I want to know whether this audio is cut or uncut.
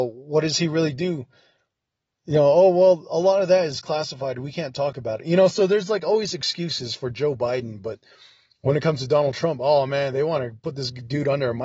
uncut